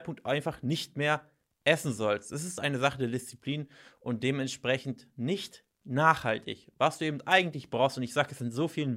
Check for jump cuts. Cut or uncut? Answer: uncut